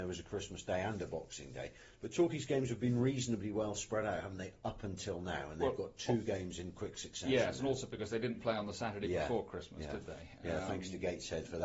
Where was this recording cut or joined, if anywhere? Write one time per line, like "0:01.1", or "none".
none

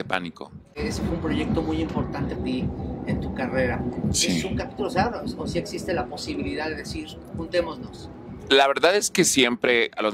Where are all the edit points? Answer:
0:02.4

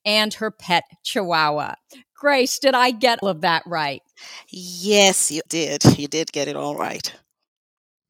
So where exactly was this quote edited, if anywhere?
0:03.2
0:05.5

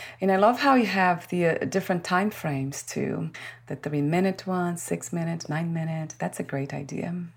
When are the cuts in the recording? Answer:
none

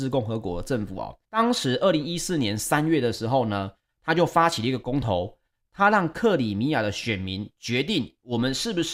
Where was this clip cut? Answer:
0:01.2

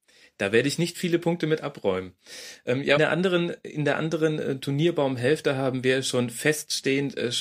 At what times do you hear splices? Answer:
0:03.0

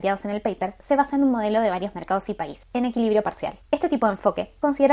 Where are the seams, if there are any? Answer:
none

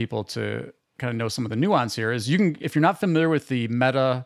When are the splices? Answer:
0:02.6

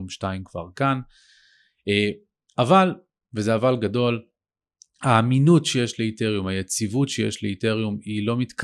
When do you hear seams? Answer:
none

